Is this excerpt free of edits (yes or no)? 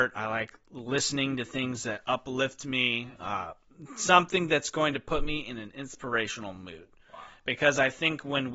yes